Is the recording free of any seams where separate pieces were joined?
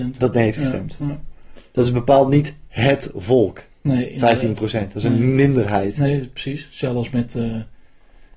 no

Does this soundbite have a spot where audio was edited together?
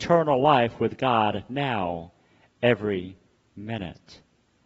no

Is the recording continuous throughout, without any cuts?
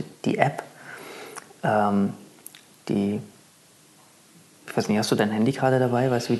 yes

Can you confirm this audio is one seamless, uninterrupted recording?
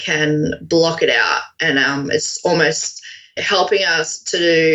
yes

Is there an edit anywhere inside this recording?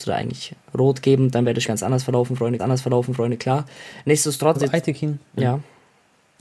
yes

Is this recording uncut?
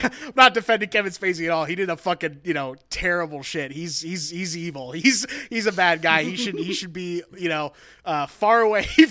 yes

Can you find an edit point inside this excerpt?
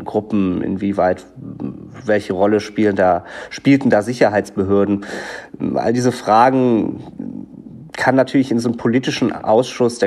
no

